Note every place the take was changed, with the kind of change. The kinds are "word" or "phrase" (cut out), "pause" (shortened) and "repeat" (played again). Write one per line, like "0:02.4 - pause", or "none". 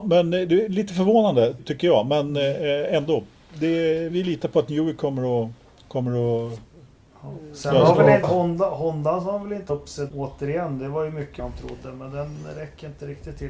0:01.6 - word
0:04.1 - word
0:08.2 - word
0:09.7 - word
0:10.1 - word
0:11.4 - word